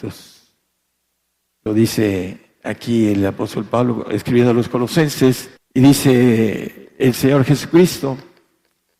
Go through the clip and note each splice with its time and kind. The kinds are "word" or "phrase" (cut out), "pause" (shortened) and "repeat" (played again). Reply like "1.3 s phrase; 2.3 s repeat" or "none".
5.6 s pause